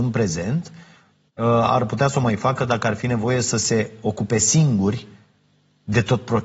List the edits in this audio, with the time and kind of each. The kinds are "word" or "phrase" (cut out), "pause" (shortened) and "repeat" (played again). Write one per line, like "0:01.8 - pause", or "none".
none